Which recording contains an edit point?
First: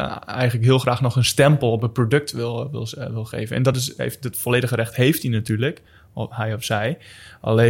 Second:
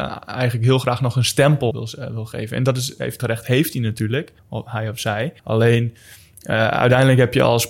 second; 4 cuts; at 1.7 s, 3.2 s, 4.4 s, 5.4 s

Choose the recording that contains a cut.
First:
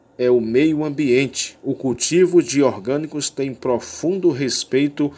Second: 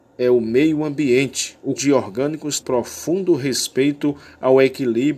second; 2 cuts; at 1.8 s, 2.6 s

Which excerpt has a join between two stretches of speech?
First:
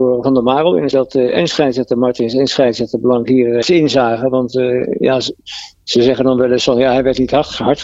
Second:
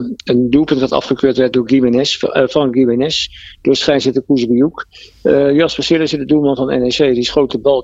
first; 2 cuts; at 0.9 s, 3.6 s

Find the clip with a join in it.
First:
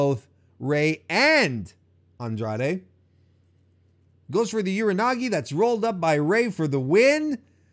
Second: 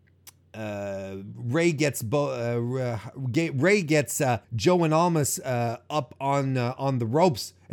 second; 1 cut; at 4.4 s

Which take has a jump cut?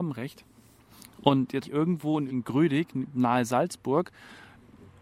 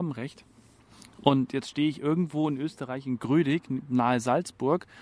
first; 2 cuts; at 1.6 s, 2.3 s

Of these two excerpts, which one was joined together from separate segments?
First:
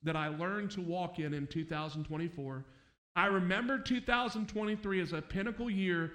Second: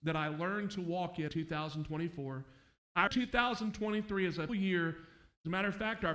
second; 3 cuts; at 1.3 s, 3.1 s, 4.5 s

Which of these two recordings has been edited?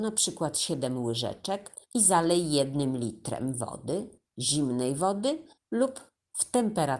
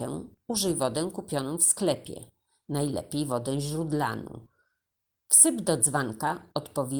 first; 3 cuts; at 1.9 s, 4.3 s, 5.6 s

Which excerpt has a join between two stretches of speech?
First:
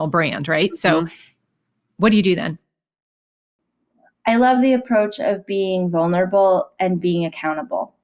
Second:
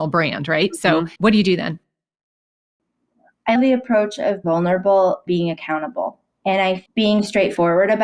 second; 5 cuts; at 1.2 s, 3.6 s, 4.4 s, 5.3 s, 6.9 s

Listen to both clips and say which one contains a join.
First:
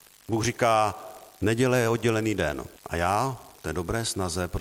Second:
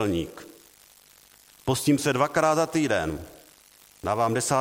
first; 1 cut; at 2.8 s

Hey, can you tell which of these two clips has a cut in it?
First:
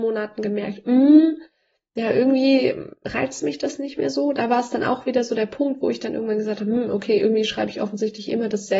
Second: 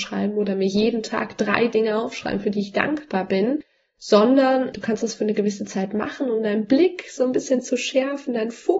second; 1 cut; at 4.7 s

